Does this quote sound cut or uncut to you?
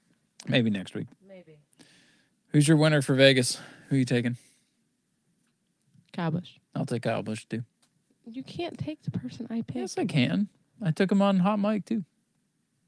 uncut